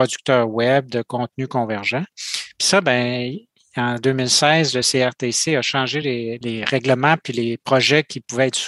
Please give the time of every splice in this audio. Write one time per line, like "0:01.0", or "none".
none